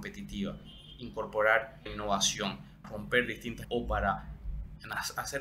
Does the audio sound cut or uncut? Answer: cut